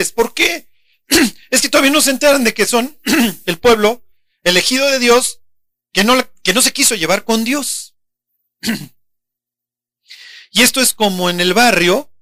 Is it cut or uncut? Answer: uncut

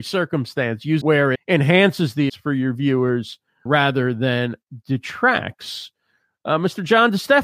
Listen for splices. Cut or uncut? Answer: cut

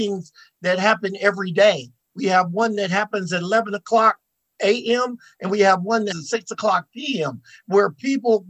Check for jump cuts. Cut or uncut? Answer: cut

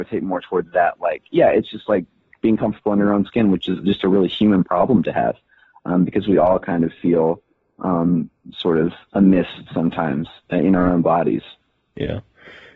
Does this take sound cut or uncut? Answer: uncut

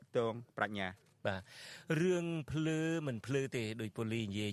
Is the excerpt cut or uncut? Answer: uncut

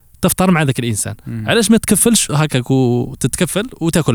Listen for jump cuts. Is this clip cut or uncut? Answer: cut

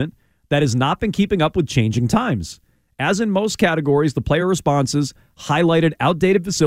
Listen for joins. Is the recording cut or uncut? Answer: uncut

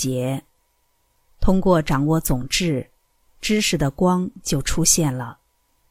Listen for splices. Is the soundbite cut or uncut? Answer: uncut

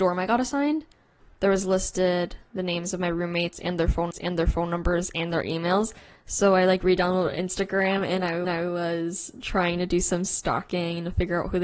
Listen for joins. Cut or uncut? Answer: cut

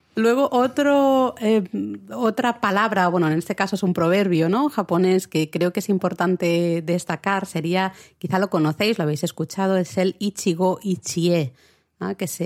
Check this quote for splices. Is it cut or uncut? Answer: uncut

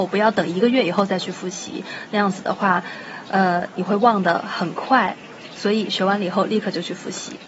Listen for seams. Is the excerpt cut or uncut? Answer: uncut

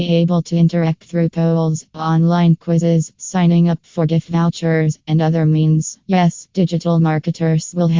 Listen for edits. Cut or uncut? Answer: cut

